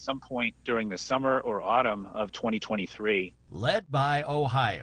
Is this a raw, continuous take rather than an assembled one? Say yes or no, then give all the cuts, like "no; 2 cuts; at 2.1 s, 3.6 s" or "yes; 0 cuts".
yes; 0 cuts